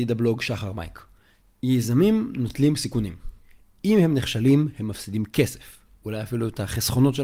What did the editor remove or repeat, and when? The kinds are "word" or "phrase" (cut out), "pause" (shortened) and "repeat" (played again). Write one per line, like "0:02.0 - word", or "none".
none